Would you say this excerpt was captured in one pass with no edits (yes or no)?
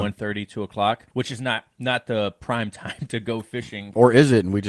no